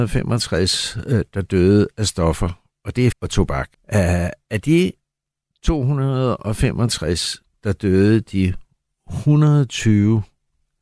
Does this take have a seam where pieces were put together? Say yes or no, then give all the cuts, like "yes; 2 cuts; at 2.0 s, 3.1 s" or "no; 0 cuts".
yes; 2 cuts; at 3.1 s, 3.7 s